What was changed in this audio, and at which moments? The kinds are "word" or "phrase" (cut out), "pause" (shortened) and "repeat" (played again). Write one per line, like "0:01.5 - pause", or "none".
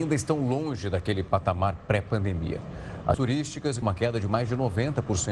0:03.1 - word
0:03.8 - phrase